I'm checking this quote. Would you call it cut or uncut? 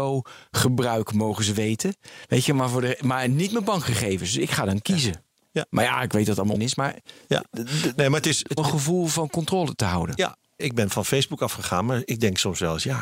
cut